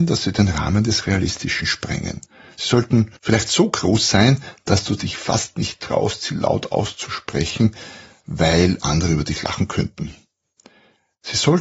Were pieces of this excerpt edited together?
yes; 1 cut; at 3.2 s

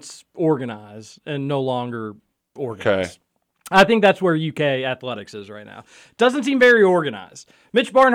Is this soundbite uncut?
yes; 0 cuts

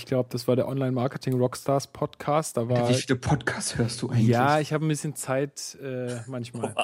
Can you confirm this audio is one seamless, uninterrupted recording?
yes; 0 cuts

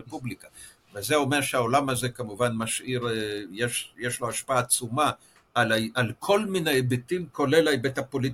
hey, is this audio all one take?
yes; 0 cuts

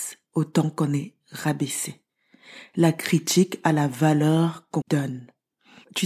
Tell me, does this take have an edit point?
yes; 1 cut; at 4.8 s

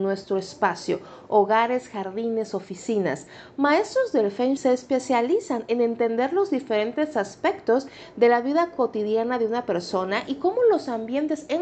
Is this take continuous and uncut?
no; 1 cut; at 4.6 s

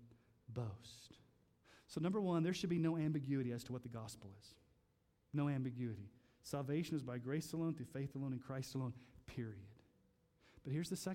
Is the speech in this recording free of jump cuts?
yes; 0 cuts

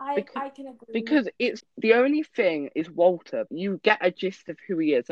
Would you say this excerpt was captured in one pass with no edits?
no; 2 cuts; at 1.6 s, 3.5 s

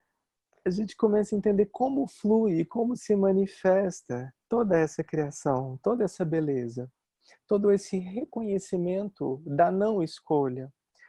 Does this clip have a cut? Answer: yes; 1 cut; at 4.4 s

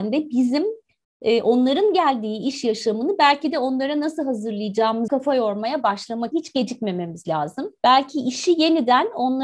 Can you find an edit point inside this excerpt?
yes; 3 cuts; at 5.1 s, 6.3 s, 7.8 s

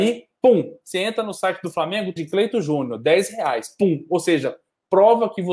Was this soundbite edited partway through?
yes; 1 cut; at 2.2 s

